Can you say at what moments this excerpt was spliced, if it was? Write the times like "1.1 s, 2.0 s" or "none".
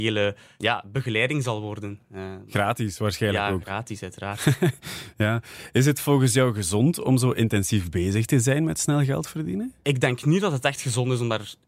none